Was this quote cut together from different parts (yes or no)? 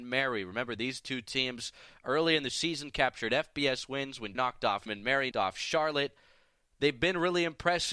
yes